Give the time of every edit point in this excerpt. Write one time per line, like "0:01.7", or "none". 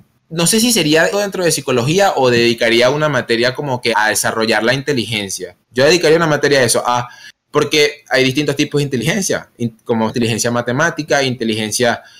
0:01.1
0:03.9
0:05.6
0:10.1